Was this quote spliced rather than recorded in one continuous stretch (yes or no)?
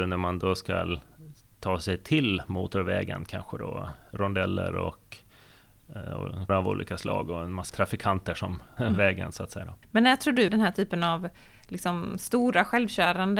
yes